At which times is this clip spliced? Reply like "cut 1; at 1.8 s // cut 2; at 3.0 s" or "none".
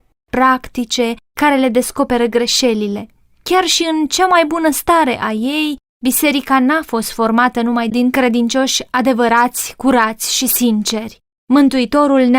none